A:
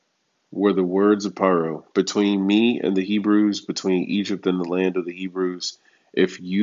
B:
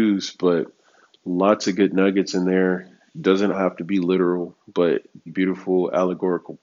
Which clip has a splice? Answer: B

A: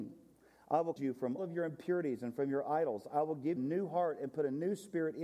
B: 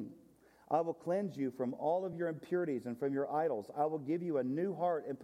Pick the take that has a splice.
A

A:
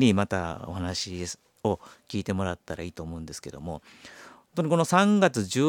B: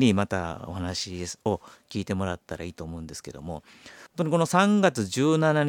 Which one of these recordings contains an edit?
B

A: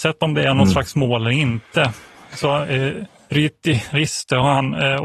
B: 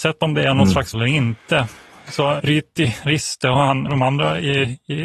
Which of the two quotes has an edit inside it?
B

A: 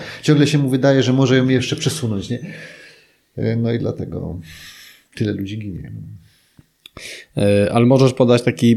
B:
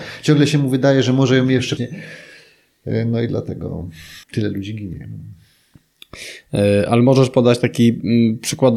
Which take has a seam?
B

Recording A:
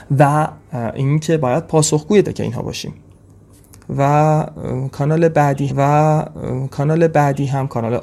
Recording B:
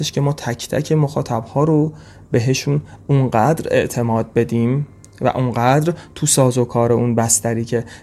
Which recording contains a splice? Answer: A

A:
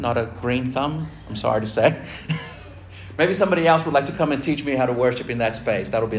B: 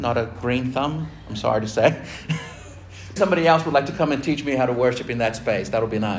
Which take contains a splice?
B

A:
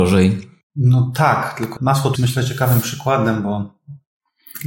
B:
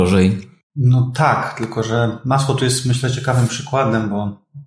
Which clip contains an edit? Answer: A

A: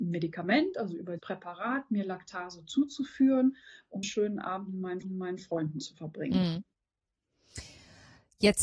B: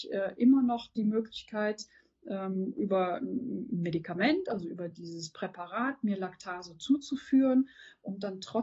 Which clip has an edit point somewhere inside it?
A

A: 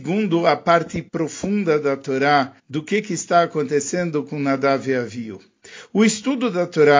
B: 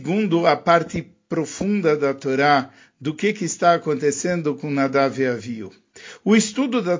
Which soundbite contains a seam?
A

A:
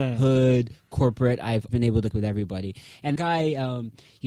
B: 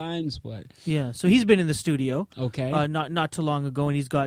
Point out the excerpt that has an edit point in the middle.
A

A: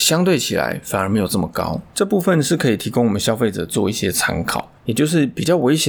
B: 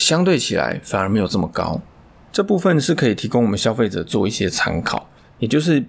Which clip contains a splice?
A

